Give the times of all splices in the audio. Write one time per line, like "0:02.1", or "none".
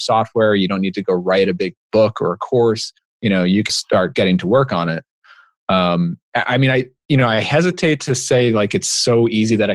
0:01.8
0:03.0
0:03.7
0:06.2